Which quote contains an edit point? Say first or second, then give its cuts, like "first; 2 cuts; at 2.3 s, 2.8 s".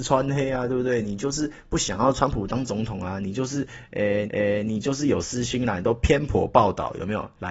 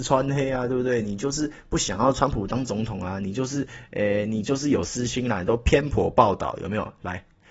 first; 1 cut; at 4.3 s